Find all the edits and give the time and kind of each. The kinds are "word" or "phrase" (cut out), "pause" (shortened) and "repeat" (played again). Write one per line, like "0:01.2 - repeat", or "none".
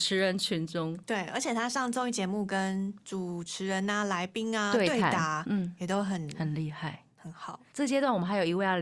none